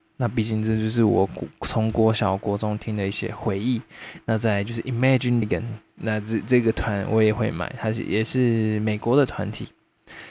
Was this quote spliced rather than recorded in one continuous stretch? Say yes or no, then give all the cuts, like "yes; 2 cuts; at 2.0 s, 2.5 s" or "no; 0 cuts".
yes; 1 cut; at 5.4 s